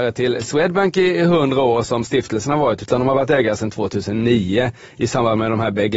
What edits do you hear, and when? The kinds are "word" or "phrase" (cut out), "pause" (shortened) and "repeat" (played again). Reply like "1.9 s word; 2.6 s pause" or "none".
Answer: none

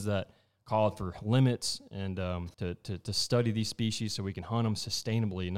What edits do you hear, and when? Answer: 2.5 s pause

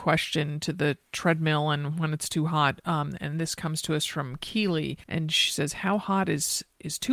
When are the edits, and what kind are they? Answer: 5.0 s pause

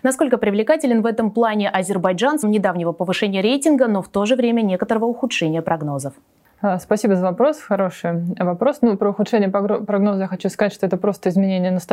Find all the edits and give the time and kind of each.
2.4 s word

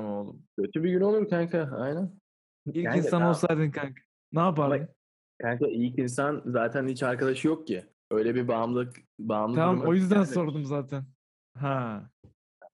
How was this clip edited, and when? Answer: none

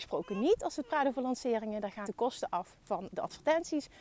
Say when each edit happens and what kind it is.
2.0 s word

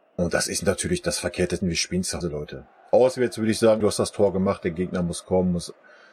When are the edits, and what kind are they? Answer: 1.6 s word; 2.2 s word; 3.8 s word

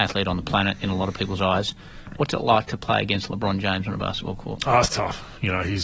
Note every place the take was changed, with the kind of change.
none

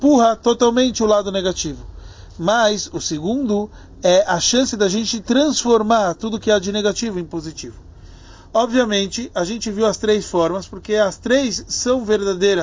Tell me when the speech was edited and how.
none

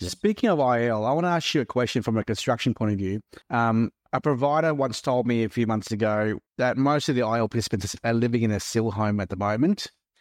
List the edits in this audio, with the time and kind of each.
3.4 s pause; 6.5 s pause

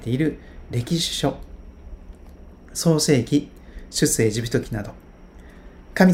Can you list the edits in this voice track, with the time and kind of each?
none

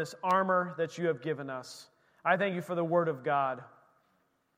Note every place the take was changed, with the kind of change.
none

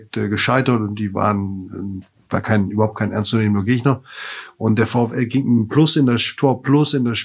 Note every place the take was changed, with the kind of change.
2.3 s word

